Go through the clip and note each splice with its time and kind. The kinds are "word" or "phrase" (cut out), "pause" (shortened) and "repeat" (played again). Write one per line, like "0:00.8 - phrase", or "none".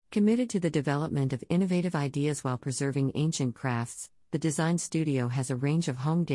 none